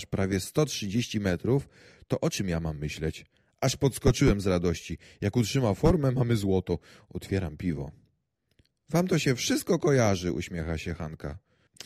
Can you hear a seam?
no; 0 cuts

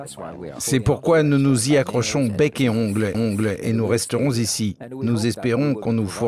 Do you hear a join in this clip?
yes; 1 cut; at 3.1 s

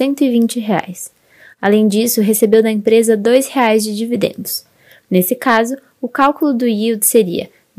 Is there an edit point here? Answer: no; 0 cuts

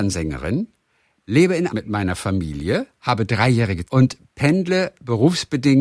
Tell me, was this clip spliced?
yes; 2 cuts; at 1.7 s, 3.8 s

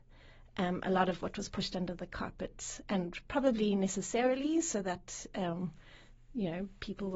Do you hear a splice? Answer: no; 0 cuts

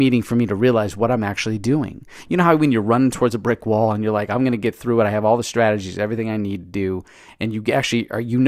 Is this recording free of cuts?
yes; 0 cuts

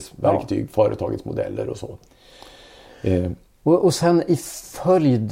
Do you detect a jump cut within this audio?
no; 0 cuts

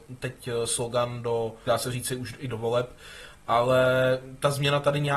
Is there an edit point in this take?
yes; 1 cut; at 1.7 s

